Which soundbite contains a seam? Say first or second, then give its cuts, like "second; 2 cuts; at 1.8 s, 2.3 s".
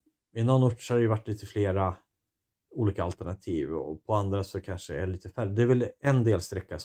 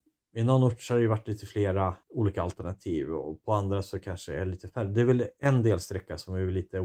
second; 1 cut; at 2.0 s